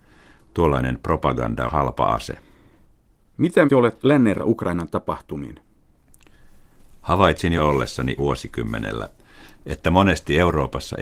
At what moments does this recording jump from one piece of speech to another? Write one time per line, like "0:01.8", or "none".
0:01.7
0:03.7
0:04.0
0:04.4
0:07.6
0:08.2